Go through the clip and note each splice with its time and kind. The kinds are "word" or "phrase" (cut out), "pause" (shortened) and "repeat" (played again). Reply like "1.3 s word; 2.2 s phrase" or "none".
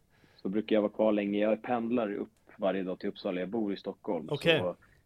none